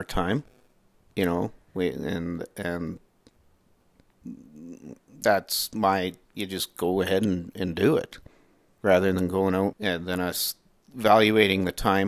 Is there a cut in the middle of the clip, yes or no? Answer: yes